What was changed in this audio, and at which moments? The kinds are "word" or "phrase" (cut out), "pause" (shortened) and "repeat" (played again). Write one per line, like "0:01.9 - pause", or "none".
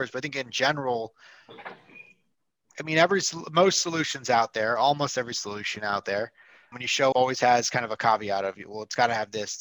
0:06.7 - word
0:07.1 - word